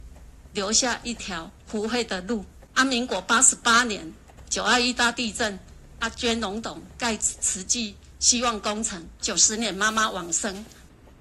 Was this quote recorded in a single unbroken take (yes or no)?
no